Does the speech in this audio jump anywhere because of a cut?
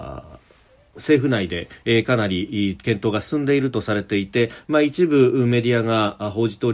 no; 0 cuts

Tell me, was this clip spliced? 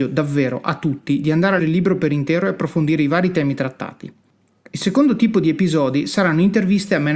yes; 1 cut; at 1.6 s

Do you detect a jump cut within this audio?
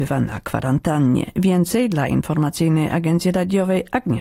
no; 0 cuts

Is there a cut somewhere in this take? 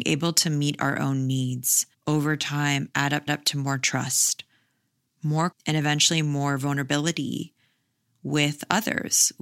yes; 3 cuts; at 1.9 s, 3.3 s, 5.5 s

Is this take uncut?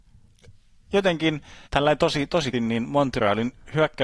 no; 2 cuts; at 1.7 s, 2.5 s

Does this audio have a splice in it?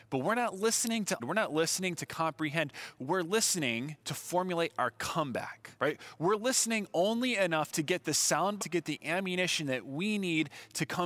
yes; 4 cuts; at 1.2 s, 4.0 s, 5.8 s, 8.6 s

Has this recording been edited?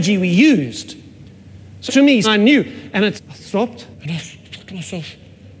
yes; 4 cuts; at 1.9 s, 2.2 s, 3.2 s, 3.9 s

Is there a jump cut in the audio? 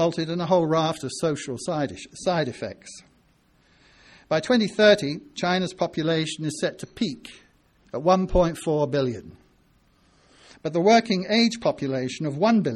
no; 0 cuts

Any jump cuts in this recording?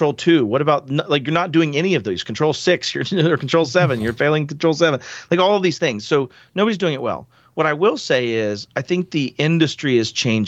no; 0 cuts

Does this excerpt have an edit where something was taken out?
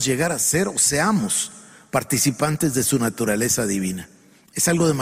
no; 0 cuts

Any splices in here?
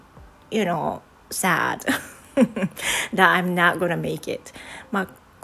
no; 0 cuts

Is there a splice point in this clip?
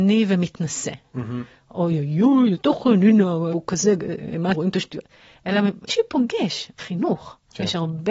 yes; 5 cuts; at 2.5 s, 3.5 s, 4.5 s, 5.9 s, 6.8 s

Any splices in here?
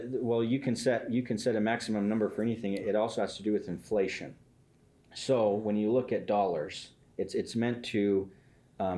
no; 0 cuts

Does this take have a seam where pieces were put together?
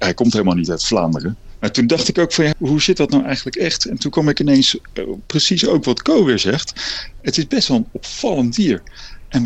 yes; 1 cut; at 2.5 s

